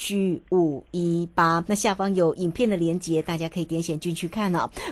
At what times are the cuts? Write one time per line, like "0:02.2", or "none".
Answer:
0:01.7